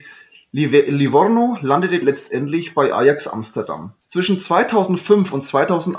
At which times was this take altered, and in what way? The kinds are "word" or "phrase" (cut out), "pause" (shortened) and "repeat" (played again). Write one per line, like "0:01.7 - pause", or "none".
0:02.0 - word
0:04.0 - pause